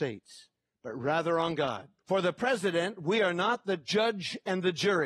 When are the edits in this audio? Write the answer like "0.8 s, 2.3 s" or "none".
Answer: 2.0 s